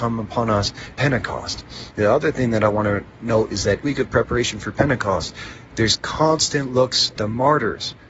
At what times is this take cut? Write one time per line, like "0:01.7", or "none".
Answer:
0:00.9
0:03.8
0:07.1